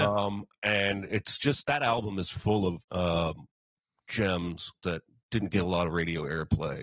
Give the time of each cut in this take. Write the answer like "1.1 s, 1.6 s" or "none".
2.8 s